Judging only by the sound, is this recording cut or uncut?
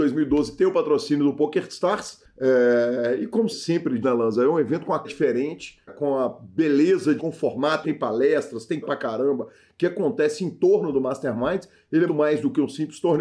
cut